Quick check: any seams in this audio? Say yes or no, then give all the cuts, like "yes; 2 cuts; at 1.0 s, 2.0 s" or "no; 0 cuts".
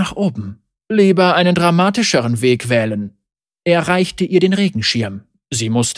no; 0 cuts